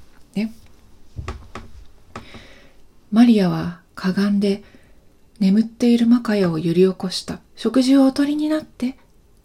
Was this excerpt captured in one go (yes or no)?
no